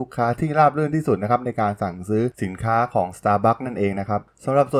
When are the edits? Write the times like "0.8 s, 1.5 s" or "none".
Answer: none